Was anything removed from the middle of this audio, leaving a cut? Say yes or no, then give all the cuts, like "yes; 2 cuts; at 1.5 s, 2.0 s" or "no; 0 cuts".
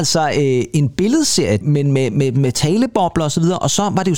no; 0 cuts